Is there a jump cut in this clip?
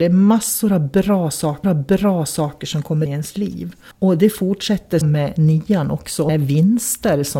yes; 5 cuts; at 1.6 s, 3.1 s, 3.9 s, 5.0 s, 6.3 s

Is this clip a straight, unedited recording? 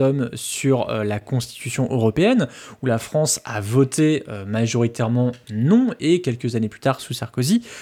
yes; 0 cuts

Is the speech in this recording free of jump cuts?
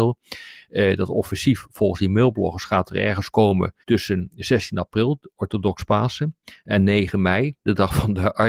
no; 1 cut; at 3.8 s

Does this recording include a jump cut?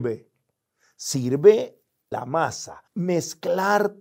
yes; 2 cuts; at 2.1 s, 2.9 s

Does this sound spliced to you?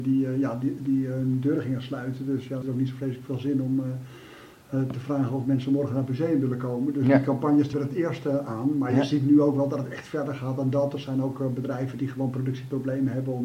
yes; 2 cuts; at 2.6 s, 7.7 s

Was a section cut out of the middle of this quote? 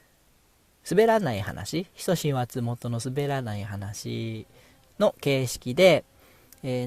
no; 0 cuts

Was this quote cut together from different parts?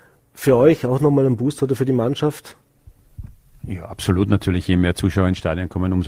no; 0 cuts

